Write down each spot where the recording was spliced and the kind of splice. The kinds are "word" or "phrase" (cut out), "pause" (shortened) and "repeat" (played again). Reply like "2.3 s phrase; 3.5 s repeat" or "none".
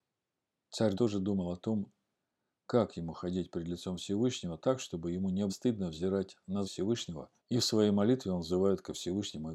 0.9 s word; 5.5 s word; 6.6 s word; 7.4 s pause